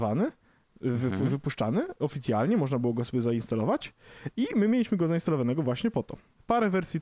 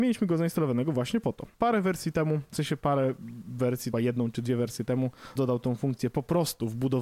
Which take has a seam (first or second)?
second